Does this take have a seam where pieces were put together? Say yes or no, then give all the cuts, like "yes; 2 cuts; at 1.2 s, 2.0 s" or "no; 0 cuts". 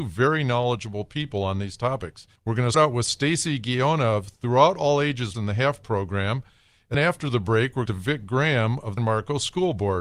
yes; 7 cuts; at 2.4 s, 2.7 s, 5.3 s, 5.8 s, 6.9 s, 7.9 s, 9.0 s